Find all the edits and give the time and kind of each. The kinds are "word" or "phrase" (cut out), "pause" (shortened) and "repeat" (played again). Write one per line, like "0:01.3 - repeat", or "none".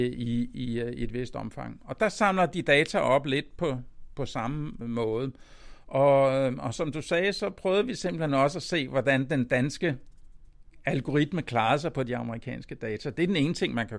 none